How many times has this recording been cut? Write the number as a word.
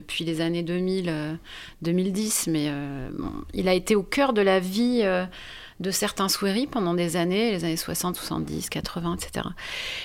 zero